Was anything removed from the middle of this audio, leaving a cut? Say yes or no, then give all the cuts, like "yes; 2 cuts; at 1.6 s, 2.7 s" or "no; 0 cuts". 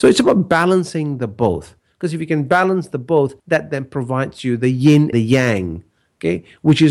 yes; 2 cuts; at 3.4 s, 5.1 s